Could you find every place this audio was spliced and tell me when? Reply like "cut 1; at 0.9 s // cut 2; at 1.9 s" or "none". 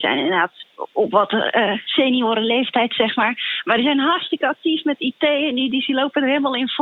none